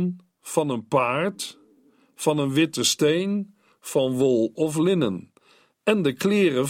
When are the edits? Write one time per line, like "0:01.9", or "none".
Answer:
none